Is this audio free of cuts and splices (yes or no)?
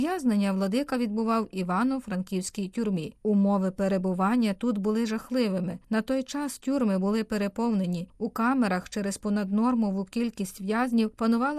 yes